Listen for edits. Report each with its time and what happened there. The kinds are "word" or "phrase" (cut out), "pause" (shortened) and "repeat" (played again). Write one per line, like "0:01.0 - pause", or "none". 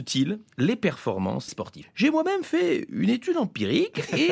0:01.5 - word
0:01.8 - word